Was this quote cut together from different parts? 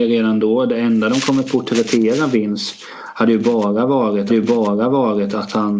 yes; 1 cut; at 4.3 s

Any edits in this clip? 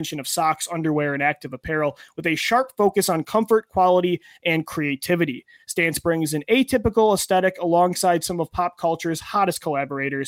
no; 0 cuts

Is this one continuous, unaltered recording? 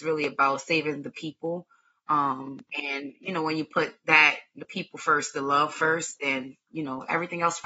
no; 1 cut; at 2.7 s

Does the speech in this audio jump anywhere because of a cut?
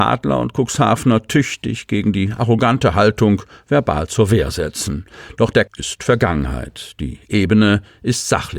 yes; 1 cut; at 5.7 s

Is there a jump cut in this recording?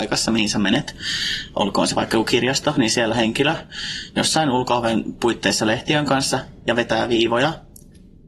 yes; 1 cut; at 3.1 s

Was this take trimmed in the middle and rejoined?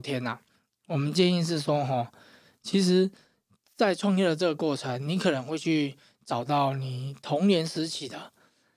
no; 0 cuts

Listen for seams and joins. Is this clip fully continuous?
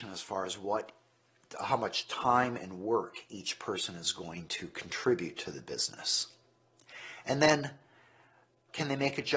yes; 0 cuts

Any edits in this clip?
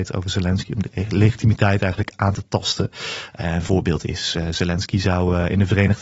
no; 0 cuts

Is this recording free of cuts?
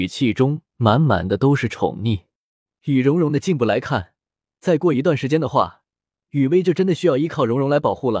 yes; 0 cuts

